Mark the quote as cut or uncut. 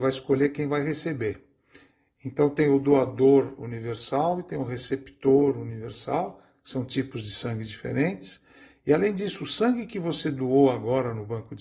uncut